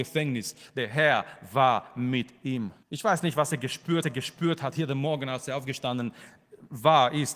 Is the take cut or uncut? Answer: cut